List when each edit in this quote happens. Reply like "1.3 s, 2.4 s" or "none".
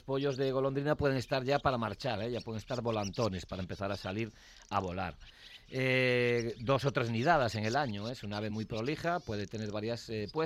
none